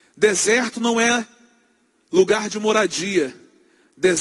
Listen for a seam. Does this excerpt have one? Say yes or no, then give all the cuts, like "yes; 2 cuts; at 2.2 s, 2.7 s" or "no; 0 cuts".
no; 0 cuts